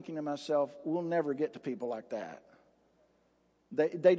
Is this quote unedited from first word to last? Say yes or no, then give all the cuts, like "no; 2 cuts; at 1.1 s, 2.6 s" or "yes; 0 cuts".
yes; 0 cuts